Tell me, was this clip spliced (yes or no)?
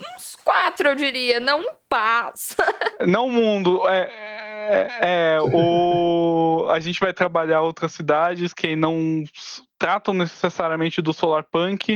no